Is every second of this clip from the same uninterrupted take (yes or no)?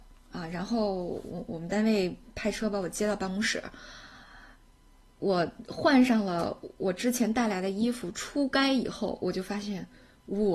yes